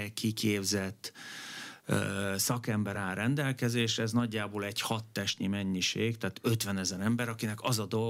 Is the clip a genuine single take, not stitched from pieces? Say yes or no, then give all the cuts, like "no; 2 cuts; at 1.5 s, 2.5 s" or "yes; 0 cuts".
yes; 0 cuts